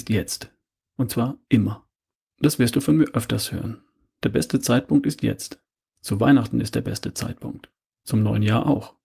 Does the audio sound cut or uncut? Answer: uncut